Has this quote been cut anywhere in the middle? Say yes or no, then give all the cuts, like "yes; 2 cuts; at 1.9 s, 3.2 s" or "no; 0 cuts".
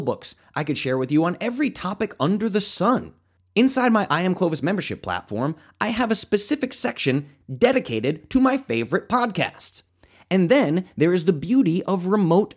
no; 0 cuts